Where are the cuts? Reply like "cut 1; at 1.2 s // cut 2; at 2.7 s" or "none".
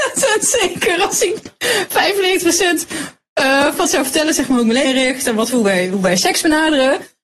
cut 1; at 3.9 s // cut 2; at 4.8 s // cut 3; at 5.5 s